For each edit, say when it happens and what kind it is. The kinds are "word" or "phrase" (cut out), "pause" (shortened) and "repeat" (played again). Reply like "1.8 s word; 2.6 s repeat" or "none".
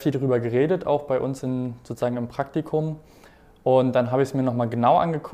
none